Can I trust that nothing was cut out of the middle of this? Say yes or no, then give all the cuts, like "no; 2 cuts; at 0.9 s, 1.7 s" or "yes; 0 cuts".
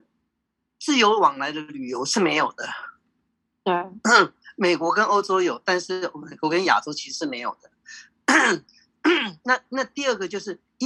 yes; 0 cuts